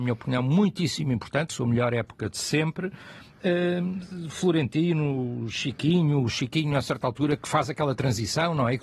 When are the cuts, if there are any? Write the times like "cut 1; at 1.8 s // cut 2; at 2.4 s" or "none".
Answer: cut 1; at 1.5 s